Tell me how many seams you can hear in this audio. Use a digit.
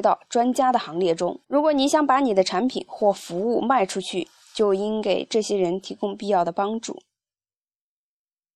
1